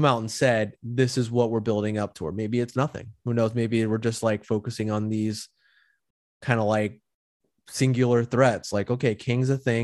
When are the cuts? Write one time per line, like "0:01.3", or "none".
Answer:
none